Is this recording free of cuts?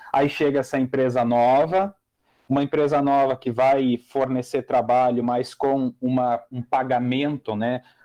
yes; 0 cuts

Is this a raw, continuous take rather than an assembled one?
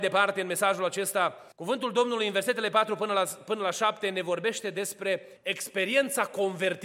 no; 2 cuts; at 1.5 s, 5.4 s

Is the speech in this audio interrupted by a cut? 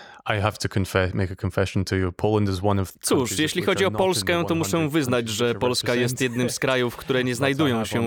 yes; 1 cut; at 2.9 s

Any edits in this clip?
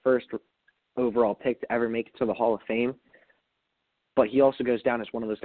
no; 0 cuts

